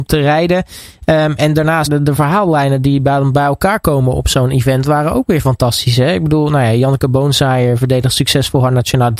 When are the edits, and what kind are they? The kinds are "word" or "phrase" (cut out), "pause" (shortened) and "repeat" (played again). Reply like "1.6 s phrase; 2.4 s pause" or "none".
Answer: 1.9 s word